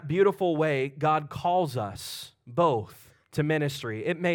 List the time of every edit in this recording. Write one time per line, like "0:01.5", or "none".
0:03.2